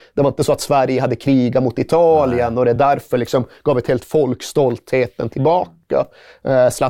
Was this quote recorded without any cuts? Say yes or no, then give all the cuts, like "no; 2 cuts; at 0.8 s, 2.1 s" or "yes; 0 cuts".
yes; 0 cuts